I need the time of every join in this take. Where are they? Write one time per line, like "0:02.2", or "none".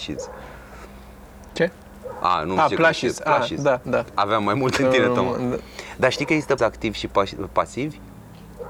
0:03.8
0:04.8
0:06.6
0:07.5

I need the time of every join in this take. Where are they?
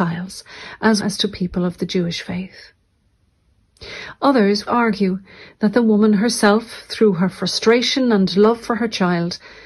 0:01.0
0:04.7

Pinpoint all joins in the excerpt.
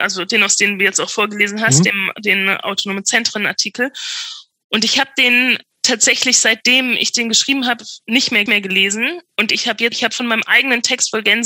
0:08.5
0:09.9

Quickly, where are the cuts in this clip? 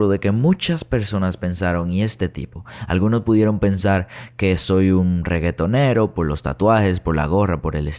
none

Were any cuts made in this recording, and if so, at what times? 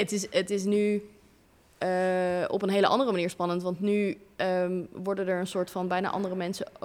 none

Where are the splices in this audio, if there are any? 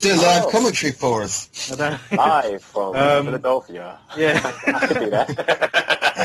none

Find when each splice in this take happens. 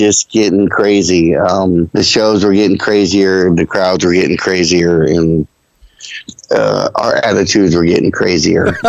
none

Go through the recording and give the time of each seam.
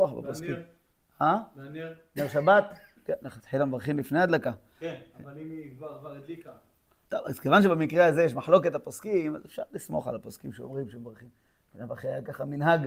none

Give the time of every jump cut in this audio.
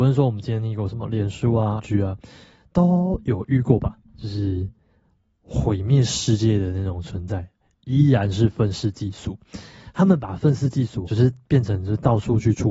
0:01.8
0:11.1

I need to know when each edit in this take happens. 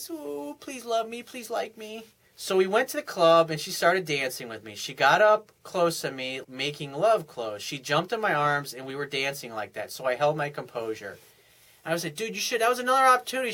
0:02.2
0:05.6
0:06.4

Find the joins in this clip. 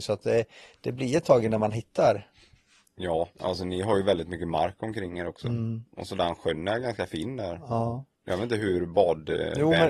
0:03.3
0:05.9
0:08.1

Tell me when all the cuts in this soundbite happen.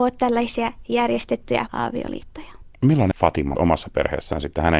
0:01.7
0:03.1
0:03.6

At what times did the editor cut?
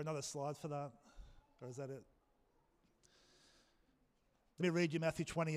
0:04.6

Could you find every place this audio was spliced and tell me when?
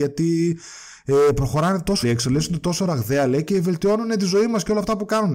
0:02.0

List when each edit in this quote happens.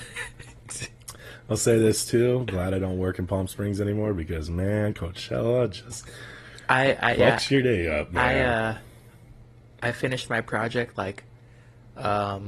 none

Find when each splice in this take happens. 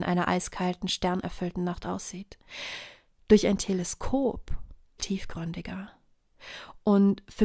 0:05.0

